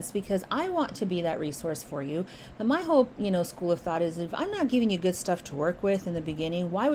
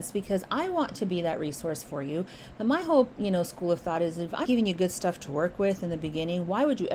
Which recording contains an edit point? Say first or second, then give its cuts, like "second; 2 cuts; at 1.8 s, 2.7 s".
second; 1 cut; at 4.5 s